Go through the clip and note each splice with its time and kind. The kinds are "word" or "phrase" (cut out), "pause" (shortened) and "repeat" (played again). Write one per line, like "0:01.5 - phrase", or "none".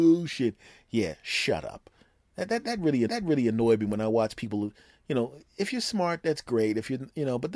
0:03.1 - repeat